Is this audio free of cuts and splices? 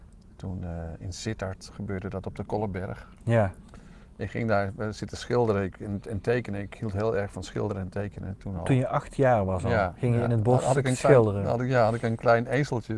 yes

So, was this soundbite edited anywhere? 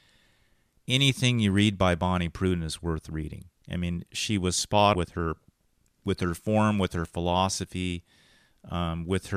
yes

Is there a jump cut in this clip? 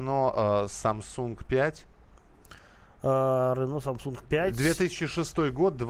no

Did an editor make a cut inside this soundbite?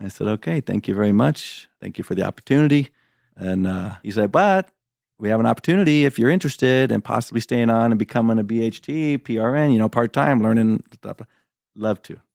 no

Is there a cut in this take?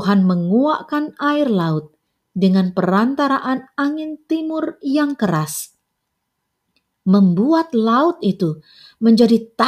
no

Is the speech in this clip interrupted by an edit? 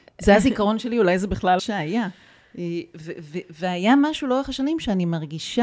yes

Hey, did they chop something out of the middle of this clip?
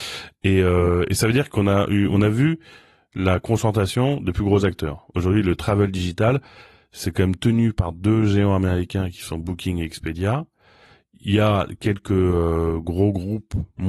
no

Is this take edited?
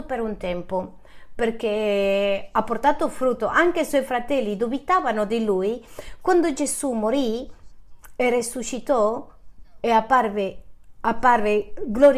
no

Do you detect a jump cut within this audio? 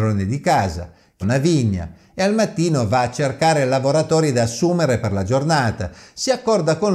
yes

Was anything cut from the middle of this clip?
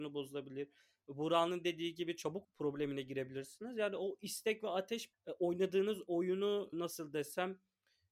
yes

